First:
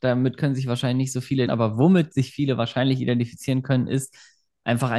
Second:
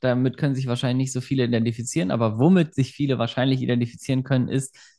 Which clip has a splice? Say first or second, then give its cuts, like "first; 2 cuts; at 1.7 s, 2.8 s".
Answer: first; 1 cut; at 1.5 s